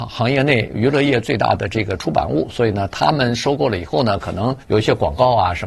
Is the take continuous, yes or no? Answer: no